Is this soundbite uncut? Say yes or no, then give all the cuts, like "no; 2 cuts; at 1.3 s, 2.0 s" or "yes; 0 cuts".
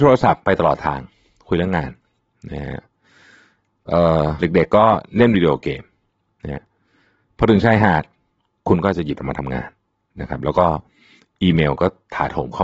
no; 1 cut; at 9.2 s